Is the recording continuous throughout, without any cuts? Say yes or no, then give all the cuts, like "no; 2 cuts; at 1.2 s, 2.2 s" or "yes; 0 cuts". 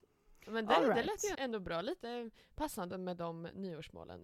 no; 2 cuts; at 1.3 s, 2.9 s